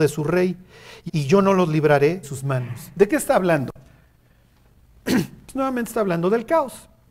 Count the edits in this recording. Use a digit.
2